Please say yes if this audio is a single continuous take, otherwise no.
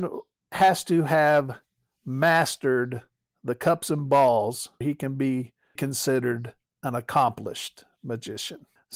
no